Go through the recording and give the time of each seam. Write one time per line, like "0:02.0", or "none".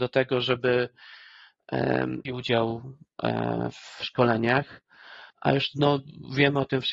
0:02.3
0:05.3